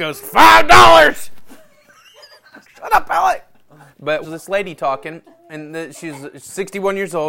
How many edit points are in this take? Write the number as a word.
three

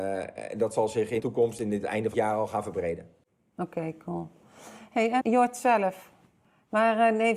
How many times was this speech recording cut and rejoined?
three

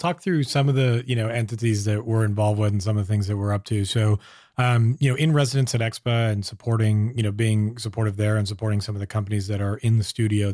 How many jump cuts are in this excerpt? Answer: zero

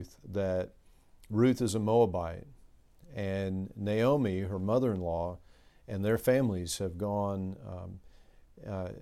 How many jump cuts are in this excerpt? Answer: zero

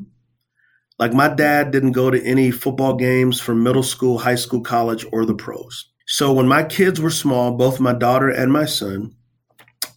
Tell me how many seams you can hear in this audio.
one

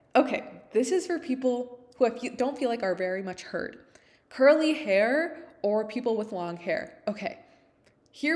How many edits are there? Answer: zero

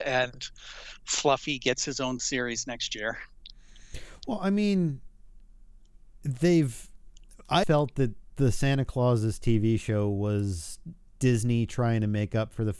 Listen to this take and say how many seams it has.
one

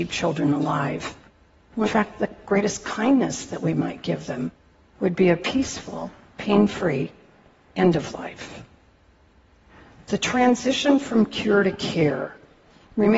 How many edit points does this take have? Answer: one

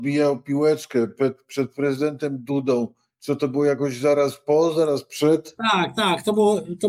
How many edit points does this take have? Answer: zero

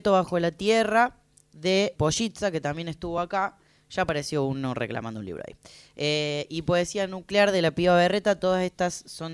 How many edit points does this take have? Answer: one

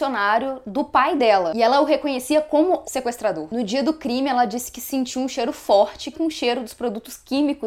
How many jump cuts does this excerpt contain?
two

